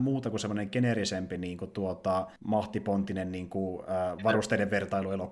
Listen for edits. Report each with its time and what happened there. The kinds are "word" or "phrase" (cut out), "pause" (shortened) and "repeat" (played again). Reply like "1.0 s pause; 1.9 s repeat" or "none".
2.4 s pause